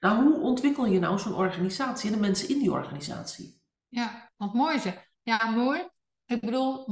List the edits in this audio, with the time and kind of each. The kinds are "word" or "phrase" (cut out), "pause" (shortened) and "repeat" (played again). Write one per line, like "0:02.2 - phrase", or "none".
none